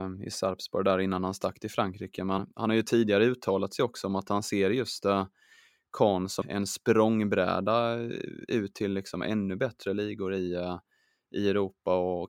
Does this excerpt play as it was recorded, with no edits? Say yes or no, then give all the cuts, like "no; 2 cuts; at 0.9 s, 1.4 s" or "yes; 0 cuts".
no; 2 cuts; at 2.4 s, 6.4 s